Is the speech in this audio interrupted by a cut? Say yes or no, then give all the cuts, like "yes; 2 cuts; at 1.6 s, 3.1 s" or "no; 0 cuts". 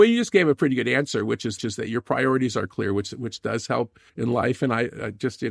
yes; 2 cuts; at 1.6 s, 4.1 s